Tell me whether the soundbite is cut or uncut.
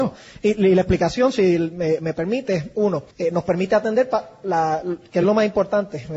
cut